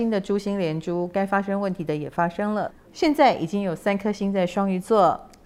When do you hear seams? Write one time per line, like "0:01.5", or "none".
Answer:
none